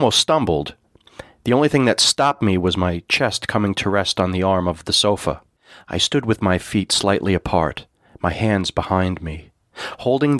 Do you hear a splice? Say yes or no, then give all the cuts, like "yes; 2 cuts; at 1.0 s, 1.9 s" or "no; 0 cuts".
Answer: yes; 2 cuts; at 5.6 s, 7.9 s